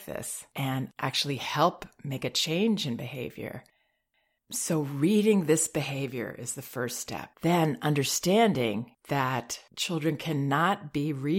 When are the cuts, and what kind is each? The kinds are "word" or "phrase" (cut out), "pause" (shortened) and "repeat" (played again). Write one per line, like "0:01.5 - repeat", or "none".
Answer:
0:07.3 - pause